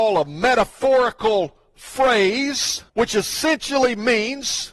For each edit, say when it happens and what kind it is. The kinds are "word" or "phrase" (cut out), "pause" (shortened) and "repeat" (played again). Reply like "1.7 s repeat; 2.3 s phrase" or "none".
2.9 s pause